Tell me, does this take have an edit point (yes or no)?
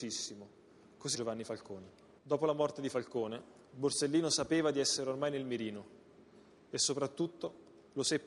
yes